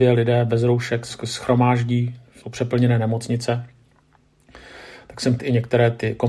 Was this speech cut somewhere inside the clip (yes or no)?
yes